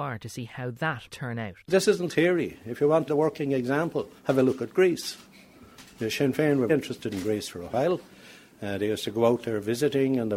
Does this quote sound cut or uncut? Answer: cut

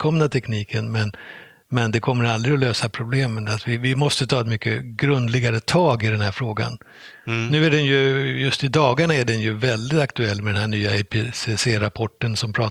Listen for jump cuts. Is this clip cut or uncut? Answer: uncut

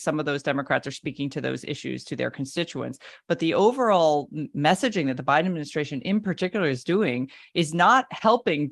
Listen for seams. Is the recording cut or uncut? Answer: uncut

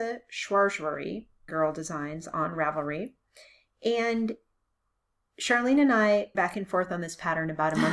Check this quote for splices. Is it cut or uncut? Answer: cut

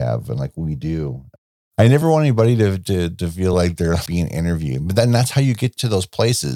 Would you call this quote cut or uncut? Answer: uncut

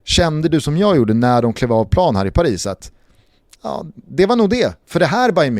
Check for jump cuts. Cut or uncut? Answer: uncut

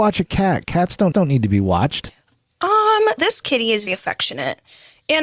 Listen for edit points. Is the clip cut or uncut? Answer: cut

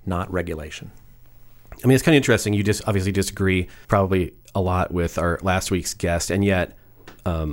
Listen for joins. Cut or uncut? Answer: cut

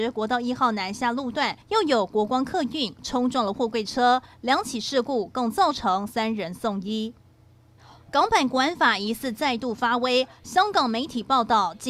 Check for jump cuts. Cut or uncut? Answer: cut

